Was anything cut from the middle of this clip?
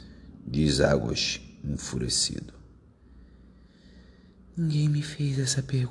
no; 0 cuts

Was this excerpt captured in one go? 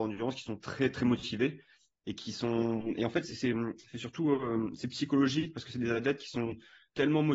yes; 0 cuts

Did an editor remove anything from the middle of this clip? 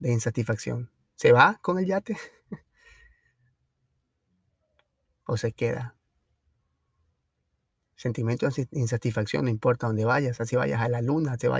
no; 0 cuts

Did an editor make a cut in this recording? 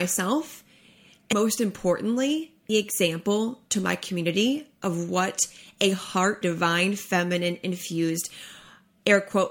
yes; 3 cuts; at 1.3 s, 2.7 s, 6.4 s

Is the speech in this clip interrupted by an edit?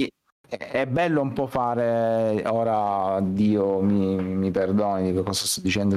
no; 0 cuts

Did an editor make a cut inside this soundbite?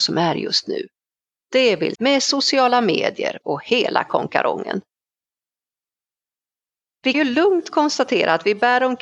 yes; 3 cuts; at 1.9 s, 3.4 s, 7.1 s

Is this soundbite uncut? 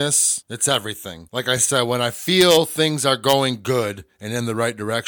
yes; 0 cuts

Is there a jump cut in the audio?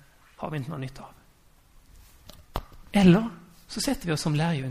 no; 0 cuts

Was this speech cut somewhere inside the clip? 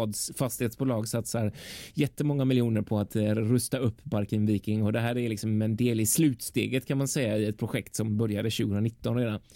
no; 0 cuts

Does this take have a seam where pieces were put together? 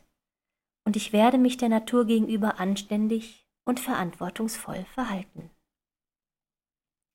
no; 0 cuts

